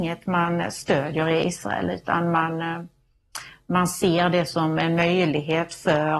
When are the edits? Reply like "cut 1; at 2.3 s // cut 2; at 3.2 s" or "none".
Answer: none